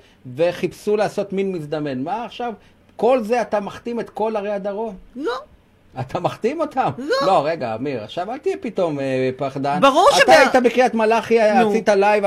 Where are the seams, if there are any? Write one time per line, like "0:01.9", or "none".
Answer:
none